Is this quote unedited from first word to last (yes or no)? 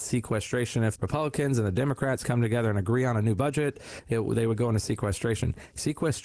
no